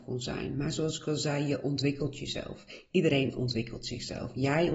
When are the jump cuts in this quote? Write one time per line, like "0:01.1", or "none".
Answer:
none